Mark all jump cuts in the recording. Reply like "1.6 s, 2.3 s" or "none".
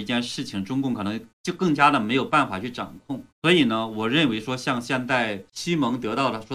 1.3 s, 3.3 s, 5.5 s